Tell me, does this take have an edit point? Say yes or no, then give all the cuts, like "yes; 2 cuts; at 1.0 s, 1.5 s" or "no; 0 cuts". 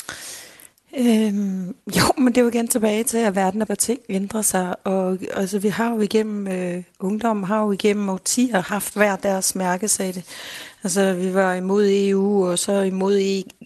yes; 1 cut; at 3.7 s